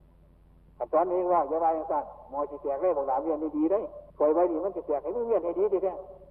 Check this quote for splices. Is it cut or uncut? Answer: cut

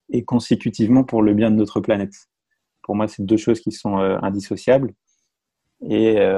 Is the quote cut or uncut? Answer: uncut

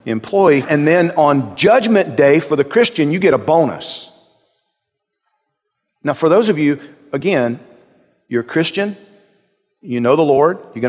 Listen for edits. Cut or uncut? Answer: uncut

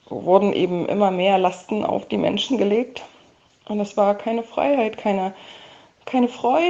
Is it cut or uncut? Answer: uncut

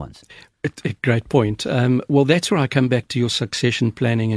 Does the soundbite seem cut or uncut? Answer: uncut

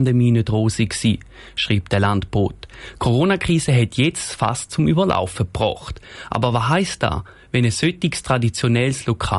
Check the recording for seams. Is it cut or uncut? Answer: uncut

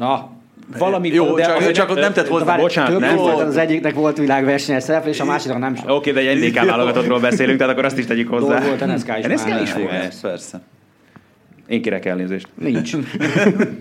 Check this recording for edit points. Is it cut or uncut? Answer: uncut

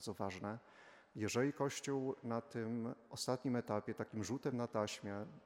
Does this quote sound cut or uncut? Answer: uncut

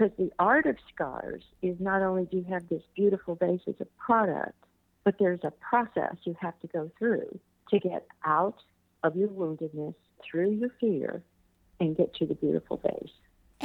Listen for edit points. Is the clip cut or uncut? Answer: cut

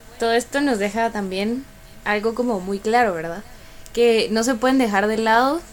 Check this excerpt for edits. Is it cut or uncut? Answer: uncut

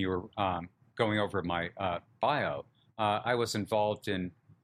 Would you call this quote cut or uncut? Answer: uncut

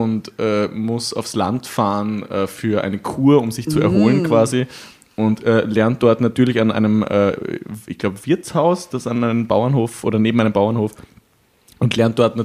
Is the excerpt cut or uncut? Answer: uncut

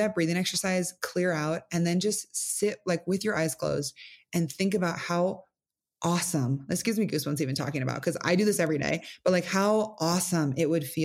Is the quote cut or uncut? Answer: uncut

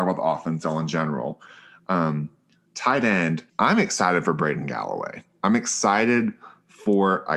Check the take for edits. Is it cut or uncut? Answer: cut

